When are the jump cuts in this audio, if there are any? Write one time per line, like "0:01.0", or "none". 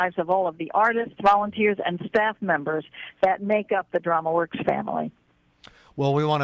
none

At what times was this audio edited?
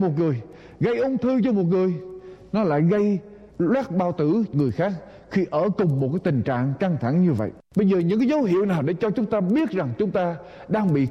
0:03.5
0:04.5
0:07.6

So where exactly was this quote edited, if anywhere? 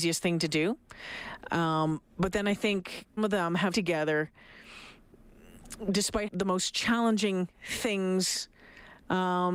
0:02.1
0:03.2
0:03.7
0:06.3
0:07.5

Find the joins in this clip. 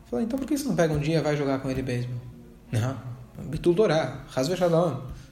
none

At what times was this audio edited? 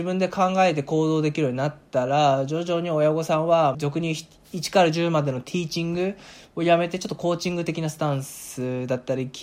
0:03.7

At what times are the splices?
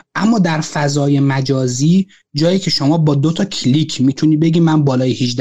none

